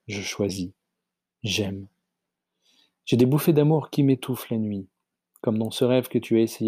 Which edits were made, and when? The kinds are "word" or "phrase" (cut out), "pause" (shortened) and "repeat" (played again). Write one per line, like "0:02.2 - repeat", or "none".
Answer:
none